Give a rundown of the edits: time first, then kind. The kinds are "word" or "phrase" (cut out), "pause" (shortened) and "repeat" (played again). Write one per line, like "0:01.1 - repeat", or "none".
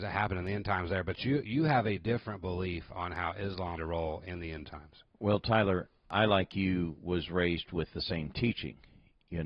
0:01.4 - word
0:03.8 - phrase

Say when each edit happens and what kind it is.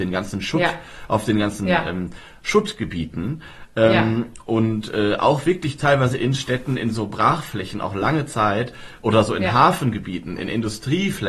none

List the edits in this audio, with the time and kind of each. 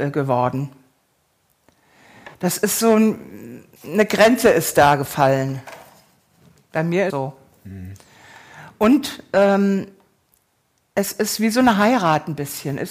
0:02.3 - pause
0:03.8 - phrase
0:07.1 - phrase

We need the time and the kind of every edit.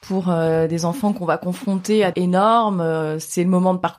0:02.1 - phrase

